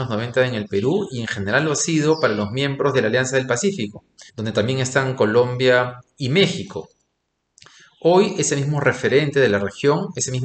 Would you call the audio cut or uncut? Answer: cut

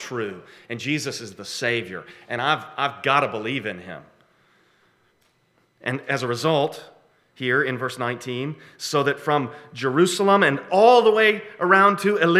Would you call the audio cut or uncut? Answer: uncut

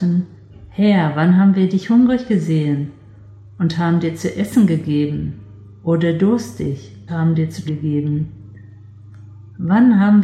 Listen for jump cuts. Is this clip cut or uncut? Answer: cut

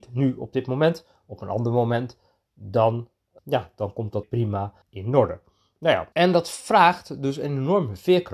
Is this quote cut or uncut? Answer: cut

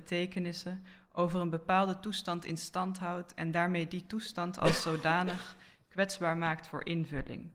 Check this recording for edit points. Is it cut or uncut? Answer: uncut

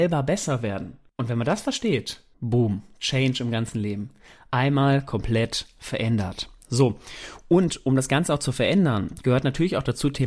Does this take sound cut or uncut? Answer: uncut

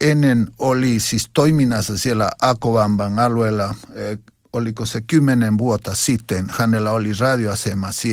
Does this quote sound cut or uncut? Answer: uncut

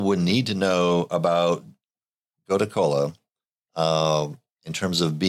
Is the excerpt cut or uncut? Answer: uncut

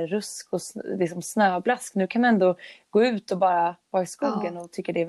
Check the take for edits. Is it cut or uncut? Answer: uncut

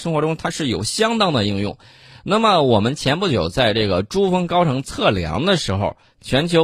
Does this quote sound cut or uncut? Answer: uncut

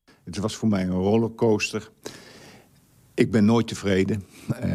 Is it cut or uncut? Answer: uncut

